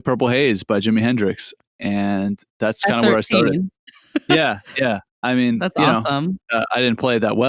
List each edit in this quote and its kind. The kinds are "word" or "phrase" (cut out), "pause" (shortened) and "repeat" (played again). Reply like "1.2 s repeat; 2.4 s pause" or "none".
3.8 s pause; 6.4 s pause